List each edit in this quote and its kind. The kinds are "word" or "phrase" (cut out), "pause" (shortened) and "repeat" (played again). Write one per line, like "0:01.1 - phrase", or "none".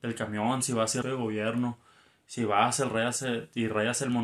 0:01.0 - phrase